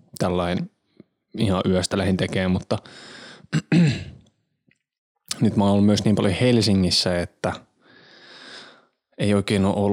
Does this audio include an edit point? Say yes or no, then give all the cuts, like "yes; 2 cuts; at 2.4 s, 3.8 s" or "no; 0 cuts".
no; 0 cuts